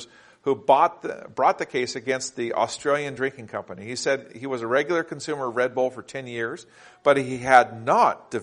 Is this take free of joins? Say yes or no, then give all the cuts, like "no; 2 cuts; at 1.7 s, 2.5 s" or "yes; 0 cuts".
yes; 0 cuts